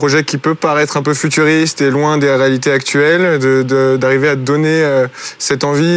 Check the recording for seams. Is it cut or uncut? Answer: uncut